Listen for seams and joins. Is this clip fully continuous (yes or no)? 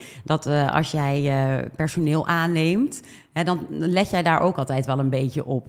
yes